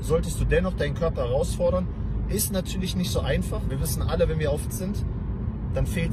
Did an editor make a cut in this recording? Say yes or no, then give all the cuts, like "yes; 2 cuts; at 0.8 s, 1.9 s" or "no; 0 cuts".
yes; 2 cuts; at 3.7 s, 4.7 s